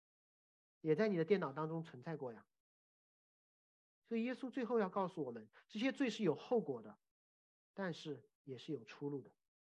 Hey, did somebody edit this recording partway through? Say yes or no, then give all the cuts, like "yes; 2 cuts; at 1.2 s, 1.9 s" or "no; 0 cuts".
yes; 1 cut; at 8.3 s